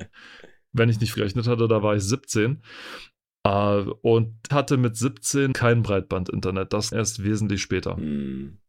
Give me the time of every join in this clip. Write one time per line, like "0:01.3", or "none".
0:01.1
0:04.5
0:05.5
0:06.9